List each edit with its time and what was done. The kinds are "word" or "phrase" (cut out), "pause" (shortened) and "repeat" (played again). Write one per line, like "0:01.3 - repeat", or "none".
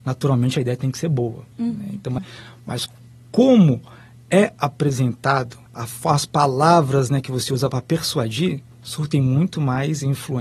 0:01.5 - pause
0:02.2 - word
0:05.7 - word
0:08.7 - pause